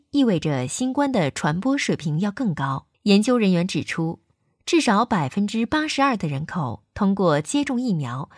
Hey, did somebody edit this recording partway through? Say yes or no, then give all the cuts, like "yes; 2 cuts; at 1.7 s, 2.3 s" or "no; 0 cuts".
yes; 1 cut; at 2.9 s